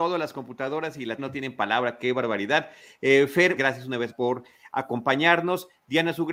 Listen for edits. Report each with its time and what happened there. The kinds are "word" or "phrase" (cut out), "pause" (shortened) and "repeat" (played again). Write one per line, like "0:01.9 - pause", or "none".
0:01.2 - word
0:03.6 - word
0:04.1 - word